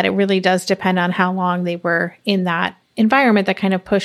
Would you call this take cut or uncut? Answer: cut